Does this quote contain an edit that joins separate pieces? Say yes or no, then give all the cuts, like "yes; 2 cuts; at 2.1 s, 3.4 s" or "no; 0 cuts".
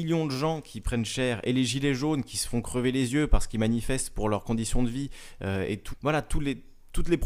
yes; 1 cut; at 5.9 s